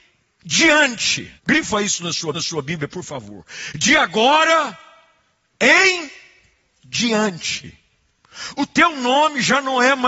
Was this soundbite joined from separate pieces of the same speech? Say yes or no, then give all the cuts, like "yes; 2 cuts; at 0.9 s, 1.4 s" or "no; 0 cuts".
yes; 2 cuts; at 1.4 s, 2.3 s